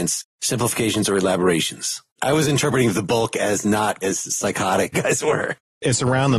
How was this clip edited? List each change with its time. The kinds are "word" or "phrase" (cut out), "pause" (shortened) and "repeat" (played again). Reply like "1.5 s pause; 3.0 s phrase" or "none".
2.1 s pause; 4.0 s word; 4.9 s phrase